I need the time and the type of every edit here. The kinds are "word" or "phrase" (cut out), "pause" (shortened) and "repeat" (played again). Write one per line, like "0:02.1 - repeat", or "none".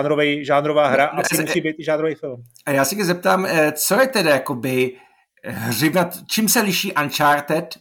0:01.2 - word